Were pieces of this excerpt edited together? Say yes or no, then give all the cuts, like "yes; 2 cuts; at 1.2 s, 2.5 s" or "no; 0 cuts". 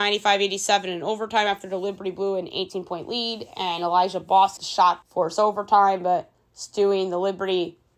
yes; 2 cuts; at 4.6 s, 5.0 s